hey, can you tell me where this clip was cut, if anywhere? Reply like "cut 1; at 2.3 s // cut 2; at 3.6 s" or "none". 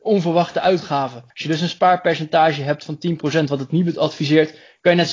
cut 1; at 1.3 s